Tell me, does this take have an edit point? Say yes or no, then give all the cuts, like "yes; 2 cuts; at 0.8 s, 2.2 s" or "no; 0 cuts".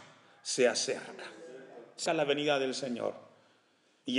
yes; 1 cut; at 2.1 s